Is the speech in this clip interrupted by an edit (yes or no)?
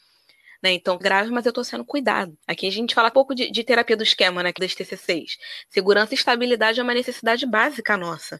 yes